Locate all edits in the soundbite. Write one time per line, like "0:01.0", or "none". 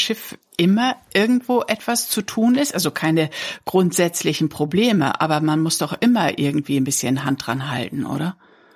none

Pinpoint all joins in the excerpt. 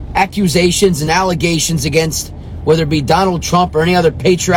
none

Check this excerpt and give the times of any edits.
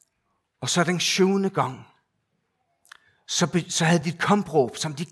none

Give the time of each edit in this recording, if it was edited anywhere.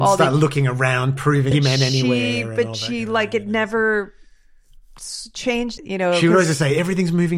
0:01.5
0:05.8

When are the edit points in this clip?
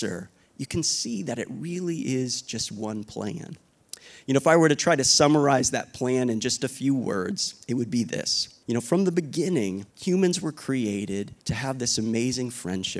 0:08.6
0:09.9
0:11.4

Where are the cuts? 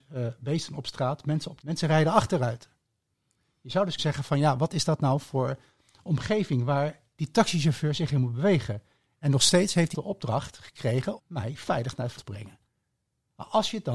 0:01.6
0:04.0
0:09.9
0:11.2
0:12.2

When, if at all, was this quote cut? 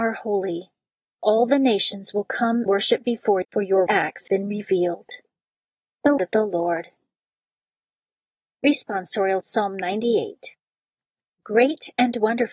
0:02.7
0:03.4
0:03.9
0:04.3
0:06.2
0:09.4

